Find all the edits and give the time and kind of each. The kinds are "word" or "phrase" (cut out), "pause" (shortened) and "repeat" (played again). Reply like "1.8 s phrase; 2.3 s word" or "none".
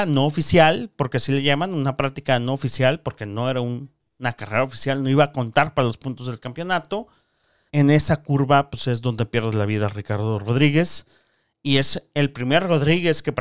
7.7 s word